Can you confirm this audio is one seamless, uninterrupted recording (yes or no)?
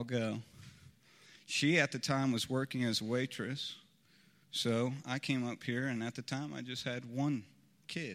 yes